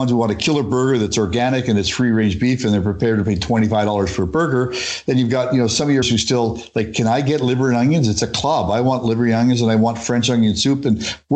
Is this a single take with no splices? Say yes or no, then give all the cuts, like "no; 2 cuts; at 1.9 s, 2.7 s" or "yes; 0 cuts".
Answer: no; 1 cut; at 6.0 s